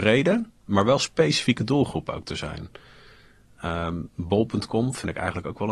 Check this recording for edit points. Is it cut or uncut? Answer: uncut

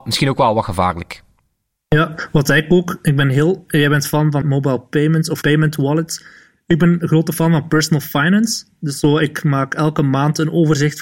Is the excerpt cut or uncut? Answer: cut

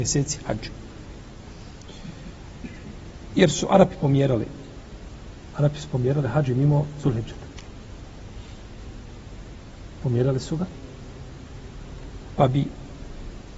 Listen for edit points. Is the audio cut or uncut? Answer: uncut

